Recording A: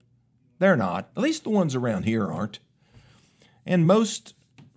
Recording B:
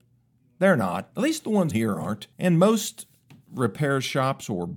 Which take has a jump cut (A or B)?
B